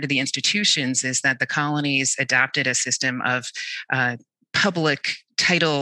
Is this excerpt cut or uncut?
uncut